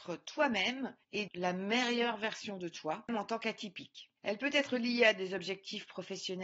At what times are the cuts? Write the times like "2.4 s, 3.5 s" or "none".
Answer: 1.3 s, 4.2 s